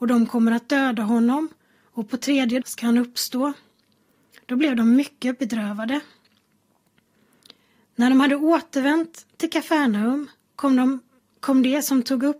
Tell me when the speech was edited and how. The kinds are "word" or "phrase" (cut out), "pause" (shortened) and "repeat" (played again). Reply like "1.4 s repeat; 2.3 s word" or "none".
2.6 s word